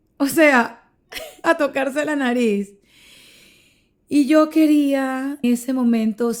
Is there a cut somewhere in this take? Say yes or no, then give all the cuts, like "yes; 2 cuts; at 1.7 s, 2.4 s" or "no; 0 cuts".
yes; 2 cuts; at 1.4 s, 5.4 s